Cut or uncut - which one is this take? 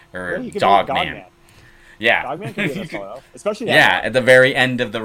uncut